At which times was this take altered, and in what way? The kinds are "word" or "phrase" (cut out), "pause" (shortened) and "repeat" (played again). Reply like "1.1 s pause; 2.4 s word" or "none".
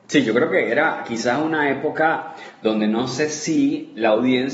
none